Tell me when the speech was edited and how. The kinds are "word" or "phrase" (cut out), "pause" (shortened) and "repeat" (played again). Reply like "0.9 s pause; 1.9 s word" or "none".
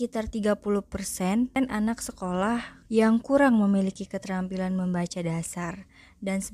2.9 s pause